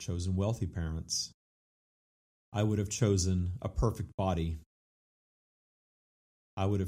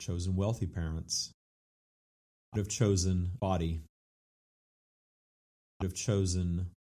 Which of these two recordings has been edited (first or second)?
second